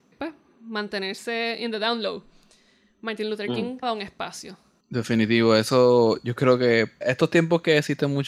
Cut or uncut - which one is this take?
cut